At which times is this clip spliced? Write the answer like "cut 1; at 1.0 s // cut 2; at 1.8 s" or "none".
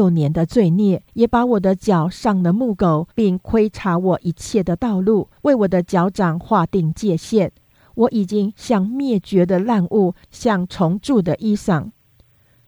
cut 1; at 1.1 s // cut 2; at 3.1 s // cut 3; at 5.4 s // cut 4; at 10.2 s